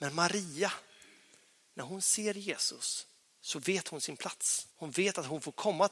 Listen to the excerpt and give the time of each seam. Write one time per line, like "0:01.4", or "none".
0:03.2
0:04.7